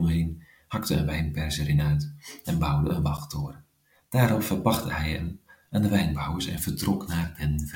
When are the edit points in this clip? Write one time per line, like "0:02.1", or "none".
none